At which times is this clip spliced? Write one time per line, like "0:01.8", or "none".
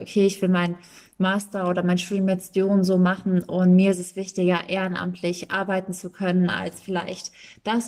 none